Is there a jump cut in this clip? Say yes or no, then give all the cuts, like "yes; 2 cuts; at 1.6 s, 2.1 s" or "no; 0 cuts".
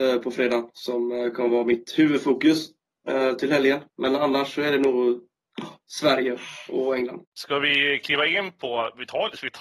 yes; 2 cuts; at 3.9 s, 7.2 s